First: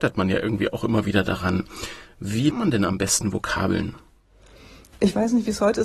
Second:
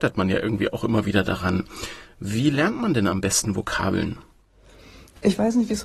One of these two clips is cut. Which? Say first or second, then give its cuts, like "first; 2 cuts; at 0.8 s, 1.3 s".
first; 1 cut; at 2.5 s